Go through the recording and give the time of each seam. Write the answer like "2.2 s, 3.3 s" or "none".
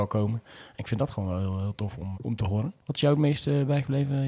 2.1 s, 2.8 s